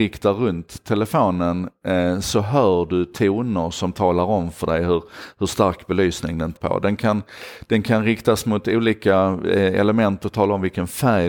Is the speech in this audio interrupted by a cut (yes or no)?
yes